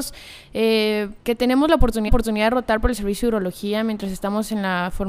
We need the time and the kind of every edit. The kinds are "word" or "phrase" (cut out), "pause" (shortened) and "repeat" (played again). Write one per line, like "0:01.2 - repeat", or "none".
0:01.2 - pause
0:02.1 - repeat